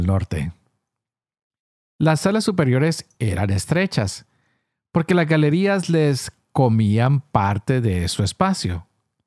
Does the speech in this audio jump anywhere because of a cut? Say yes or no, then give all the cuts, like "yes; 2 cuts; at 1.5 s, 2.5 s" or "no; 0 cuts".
no; 0 cuts